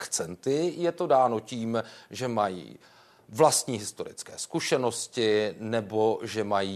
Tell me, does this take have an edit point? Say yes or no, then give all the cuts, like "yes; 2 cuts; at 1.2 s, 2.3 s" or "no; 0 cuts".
no; 0 cuts